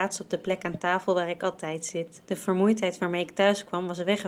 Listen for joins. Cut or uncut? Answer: cut